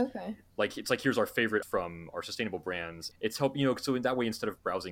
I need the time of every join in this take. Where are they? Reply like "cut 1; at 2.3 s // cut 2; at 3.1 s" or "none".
cut 1; at 1.6 s // cut 2; at 3.1 s